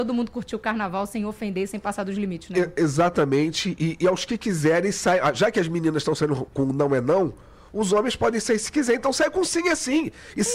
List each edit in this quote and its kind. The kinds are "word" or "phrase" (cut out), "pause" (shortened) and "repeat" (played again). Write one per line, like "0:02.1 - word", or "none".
none